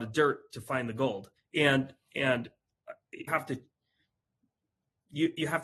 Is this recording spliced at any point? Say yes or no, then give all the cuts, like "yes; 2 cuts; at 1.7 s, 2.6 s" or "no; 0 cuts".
yes; 2 cuts; at 1.4 s, 3.3 s